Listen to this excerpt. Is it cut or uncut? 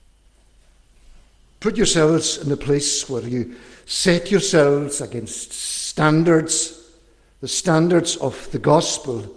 uncut